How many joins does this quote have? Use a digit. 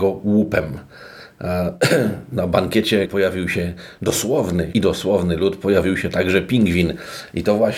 2